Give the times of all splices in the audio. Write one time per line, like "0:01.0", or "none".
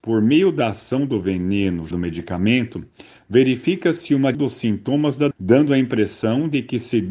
0:01.9
0:04.3
0:05.3